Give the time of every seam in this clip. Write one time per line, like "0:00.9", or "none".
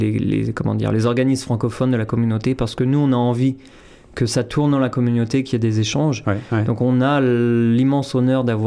none